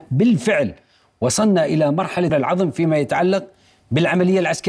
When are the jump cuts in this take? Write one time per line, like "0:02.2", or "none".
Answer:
0:02.3